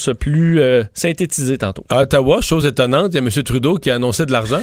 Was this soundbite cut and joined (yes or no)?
no